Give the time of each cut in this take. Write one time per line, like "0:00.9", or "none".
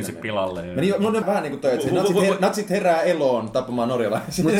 0:01.2